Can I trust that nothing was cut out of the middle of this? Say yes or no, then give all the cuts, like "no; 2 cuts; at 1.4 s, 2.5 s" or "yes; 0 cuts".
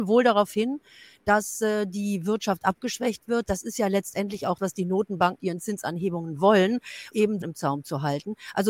no; 4 cuts; at 4.6 s, 5.4 s, 7.1 s, 7.4 s